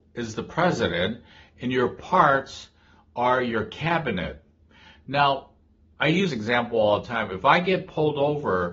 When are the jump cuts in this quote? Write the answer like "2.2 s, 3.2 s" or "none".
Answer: 6.3 s